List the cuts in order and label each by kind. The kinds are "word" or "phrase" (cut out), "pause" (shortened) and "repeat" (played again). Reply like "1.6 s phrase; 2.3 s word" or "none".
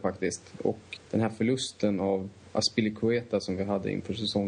1.0 s word